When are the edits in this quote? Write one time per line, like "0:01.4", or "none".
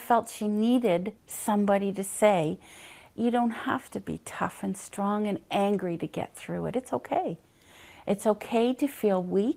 0:01.2